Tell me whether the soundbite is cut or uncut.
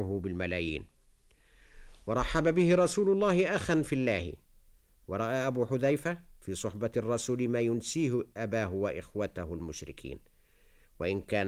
uncut